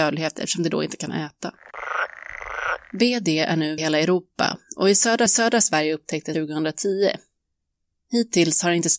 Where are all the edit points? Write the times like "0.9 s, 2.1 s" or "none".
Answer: 2.8 s, 3.8 s, 5.3 s, 6.3 s